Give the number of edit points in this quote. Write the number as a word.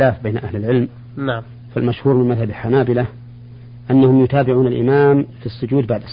zero